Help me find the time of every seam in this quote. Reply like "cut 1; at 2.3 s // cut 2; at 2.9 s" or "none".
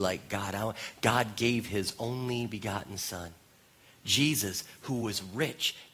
none